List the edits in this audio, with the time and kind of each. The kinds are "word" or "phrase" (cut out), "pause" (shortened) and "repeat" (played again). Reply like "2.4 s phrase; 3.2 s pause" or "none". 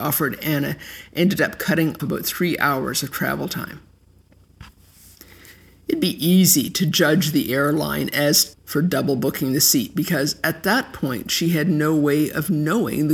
2.0 s word; 8.5 s word